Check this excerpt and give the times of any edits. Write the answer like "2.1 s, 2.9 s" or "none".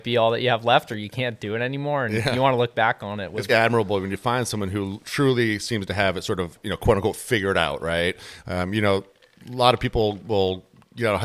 3.5 s